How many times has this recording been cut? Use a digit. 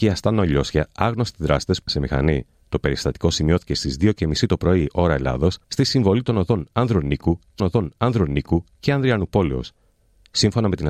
4